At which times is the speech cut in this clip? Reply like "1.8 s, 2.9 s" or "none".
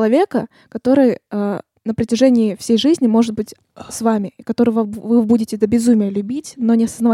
none

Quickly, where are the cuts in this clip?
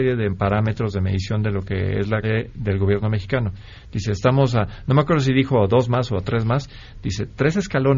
2.2 s

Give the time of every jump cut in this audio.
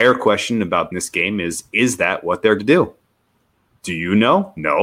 0.9 s, 2.6 s

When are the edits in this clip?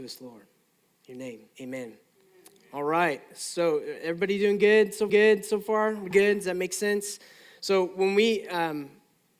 1.5 s, 5.1 s, 6.1 s

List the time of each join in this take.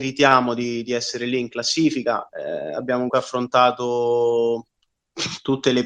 3.1 s

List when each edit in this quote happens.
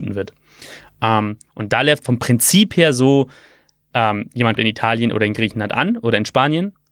2.0 s, 4.6 s

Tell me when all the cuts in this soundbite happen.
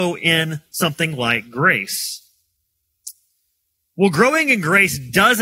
none

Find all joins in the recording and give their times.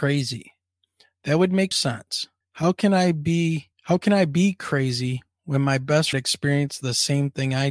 1.7 s, 2.4 s, 3.7 s, 6.1 s

